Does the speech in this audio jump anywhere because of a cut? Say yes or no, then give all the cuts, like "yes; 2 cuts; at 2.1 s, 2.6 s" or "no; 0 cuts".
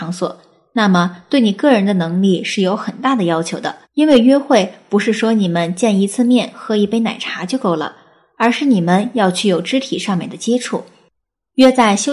yes; 1 cut; at 3.8 s